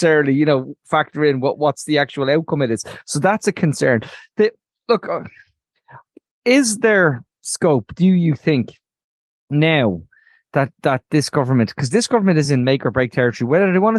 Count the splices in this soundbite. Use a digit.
0